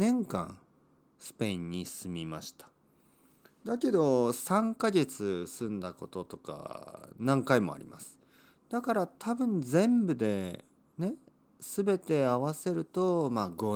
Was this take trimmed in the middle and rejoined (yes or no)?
no